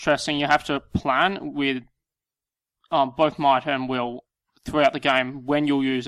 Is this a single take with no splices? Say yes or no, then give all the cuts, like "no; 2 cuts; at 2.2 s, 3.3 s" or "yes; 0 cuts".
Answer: yes; 0 cuts